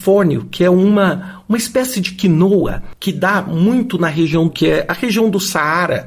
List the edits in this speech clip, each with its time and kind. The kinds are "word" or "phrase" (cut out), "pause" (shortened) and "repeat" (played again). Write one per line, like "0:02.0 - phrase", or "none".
0:04.5 - word